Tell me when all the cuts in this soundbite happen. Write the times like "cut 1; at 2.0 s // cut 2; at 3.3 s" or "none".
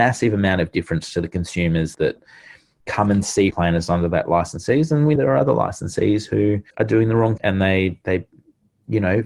cut 1; at 1.9 s // cut 2; at 3.5 s // cut 3; at 5.2 s // cut 4; at 6.7 s // cut 5; at 7.4 s